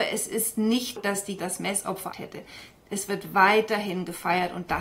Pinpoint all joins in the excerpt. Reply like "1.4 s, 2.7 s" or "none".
1.0 s, 1.4 s, 2.1 s